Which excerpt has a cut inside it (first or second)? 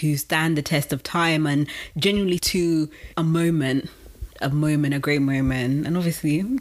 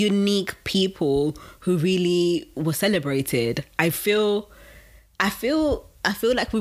first